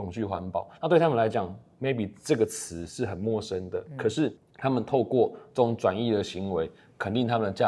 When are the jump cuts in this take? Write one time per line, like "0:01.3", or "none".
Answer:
0:04.4